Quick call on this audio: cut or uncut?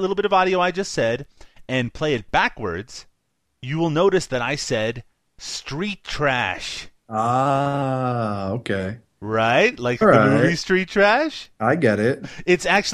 cut